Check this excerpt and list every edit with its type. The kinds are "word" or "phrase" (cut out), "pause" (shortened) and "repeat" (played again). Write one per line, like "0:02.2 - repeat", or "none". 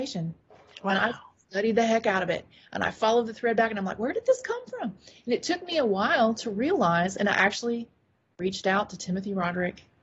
none